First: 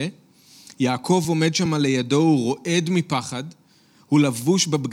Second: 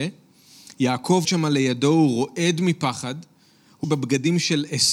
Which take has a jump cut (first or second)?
second